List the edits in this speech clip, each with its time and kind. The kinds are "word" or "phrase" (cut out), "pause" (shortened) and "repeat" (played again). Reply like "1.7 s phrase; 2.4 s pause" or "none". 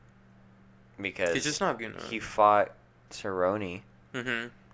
1.8 s word